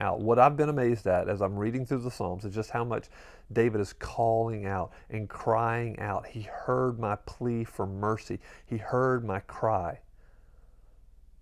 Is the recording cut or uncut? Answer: uncut